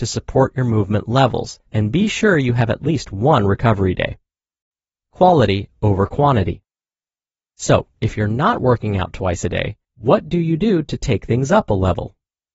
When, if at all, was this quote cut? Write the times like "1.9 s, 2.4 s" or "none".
1.7 s, 9.8 s